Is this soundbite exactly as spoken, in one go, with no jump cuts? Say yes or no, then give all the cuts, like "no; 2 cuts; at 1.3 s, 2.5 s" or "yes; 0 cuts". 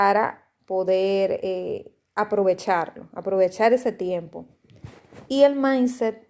yes; 0 cuts